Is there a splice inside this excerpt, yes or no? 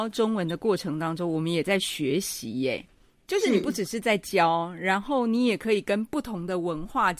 no